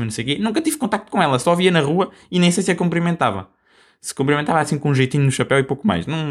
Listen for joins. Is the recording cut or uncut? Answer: uncut